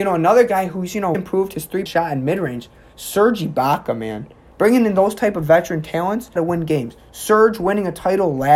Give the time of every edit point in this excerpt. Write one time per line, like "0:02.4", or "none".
0:01.1
0:01.9
0:06.4